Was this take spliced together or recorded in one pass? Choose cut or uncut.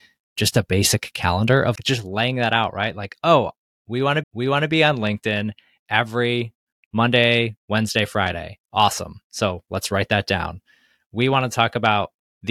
cut